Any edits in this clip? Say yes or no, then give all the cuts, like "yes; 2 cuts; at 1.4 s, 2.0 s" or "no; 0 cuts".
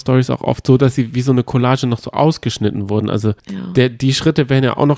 yes; 1 cut; at 3.4 s